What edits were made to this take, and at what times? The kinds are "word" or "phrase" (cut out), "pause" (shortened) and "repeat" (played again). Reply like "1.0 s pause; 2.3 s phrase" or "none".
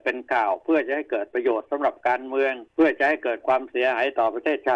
2.7 s pause